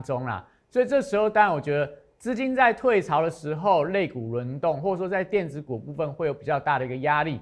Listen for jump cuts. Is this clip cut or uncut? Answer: uncut